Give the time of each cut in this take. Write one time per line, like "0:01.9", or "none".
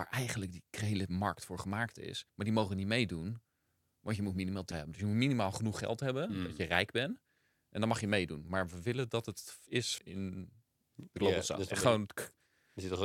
0:02.3
0:04.7
0:10.0